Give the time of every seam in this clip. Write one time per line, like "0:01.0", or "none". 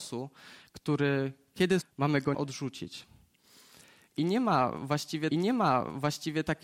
0:01.8
0:02.3
0:05.3